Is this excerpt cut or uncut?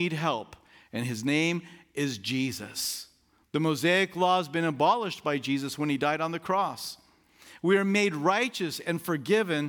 uncut